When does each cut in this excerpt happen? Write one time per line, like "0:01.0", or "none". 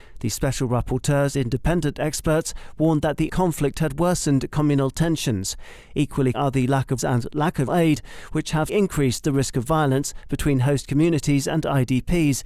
0:01.3
0:03.3
0:06.3
0:07.0
0:07.7
0:08.7